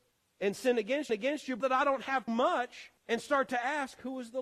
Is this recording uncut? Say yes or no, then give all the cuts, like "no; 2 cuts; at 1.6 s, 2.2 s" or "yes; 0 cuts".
no; 4 cuts; at 1.1 s, 1.6 s, 2.3 s, 3.0 s